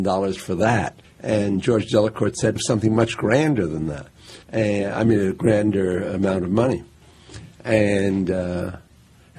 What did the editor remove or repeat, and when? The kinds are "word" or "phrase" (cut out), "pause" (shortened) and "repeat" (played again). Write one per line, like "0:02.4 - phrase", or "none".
0:01.0 - pause
0:02.6 - phrase
0:04.4 - pause